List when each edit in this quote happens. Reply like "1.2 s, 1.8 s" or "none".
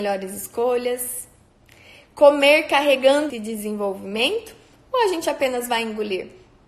3.3 s